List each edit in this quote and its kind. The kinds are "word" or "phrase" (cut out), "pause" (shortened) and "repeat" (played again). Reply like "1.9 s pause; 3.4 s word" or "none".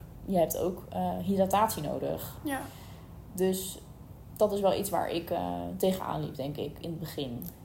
none